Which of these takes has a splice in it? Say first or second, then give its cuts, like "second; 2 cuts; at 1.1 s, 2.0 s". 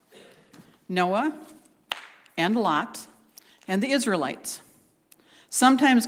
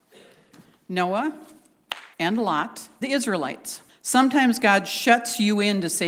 second; 3 cuts; at 2.1 s, 3.0 s, 3.9 s